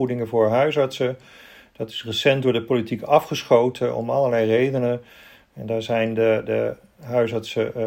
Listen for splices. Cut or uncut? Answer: uncut